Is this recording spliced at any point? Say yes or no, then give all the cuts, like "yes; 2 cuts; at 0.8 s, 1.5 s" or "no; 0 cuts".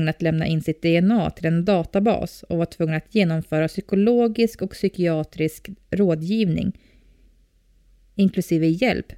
no; 0 cuts